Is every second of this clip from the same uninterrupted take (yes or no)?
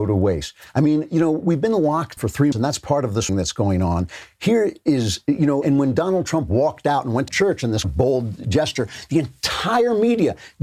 no